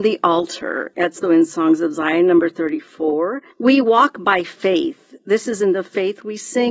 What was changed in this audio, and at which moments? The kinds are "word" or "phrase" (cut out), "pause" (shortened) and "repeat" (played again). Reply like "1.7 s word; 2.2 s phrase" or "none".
1.2 s word; 3.5 s pause